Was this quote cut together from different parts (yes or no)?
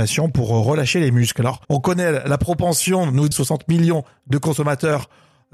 yes